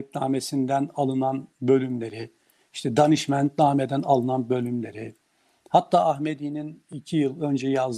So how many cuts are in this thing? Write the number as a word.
zero